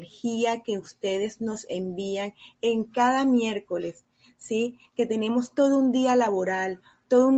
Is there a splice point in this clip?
no; 0 cuts

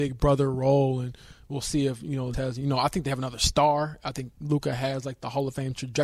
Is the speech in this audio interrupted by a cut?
yes; 1 cut; at 2.3 s

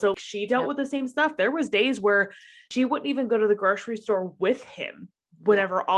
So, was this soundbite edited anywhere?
no; 0 cuts

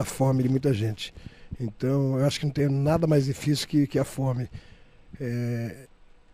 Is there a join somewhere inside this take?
no; 0 cuts

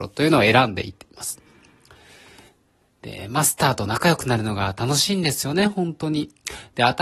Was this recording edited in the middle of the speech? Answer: no; 0 cuts

